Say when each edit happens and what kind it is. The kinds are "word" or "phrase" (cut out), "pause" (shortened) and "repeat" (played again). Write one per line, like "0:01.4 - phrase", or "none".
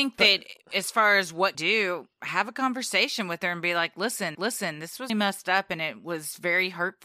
0:01.5 - phrase
0:02.1 - pause
0:04.3 - repeat
0:05.1 - word